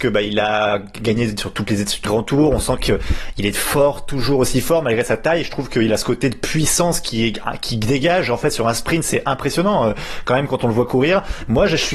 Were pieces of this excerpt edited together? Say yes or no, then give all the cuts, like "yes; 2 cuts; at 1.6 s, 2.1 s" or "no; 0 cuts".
yes; 1 cut; at 2.0 s